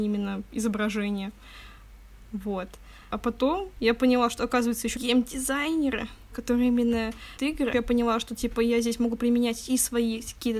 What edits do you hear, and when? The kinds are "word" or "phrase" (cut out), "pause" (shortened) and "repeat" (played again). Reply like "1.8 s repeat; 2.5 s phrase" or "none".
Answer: 5.0 s word; 6.3 s word; 7.4 s word; 7.7 s word